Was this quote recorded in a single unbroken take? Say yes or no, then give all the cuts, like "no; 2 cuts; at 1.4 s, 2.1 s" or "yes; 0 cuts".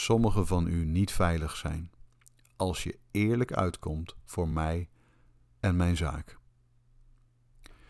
yes; 0 cuts